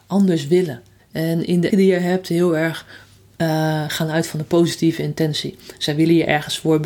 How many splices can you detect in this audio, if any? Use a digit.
2